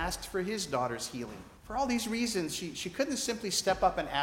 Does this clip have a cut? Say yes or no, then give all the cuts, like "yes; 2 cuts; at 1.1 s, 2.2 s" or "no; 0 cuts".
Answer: yes; 1 cut; at 1.6 s